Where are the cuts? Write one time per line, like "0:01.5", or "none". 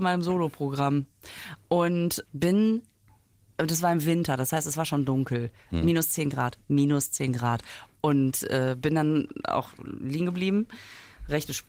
0:02.3